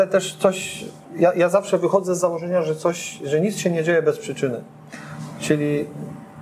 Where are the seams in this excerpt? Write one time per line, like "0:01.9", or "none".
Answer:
0:01.0